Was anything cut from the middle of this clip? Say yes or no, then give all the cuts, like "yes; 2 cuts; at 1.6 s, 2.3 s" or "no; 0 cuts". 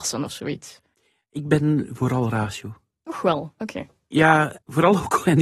no; 0 cuts